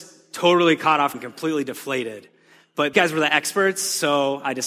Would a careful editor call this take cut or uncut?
cut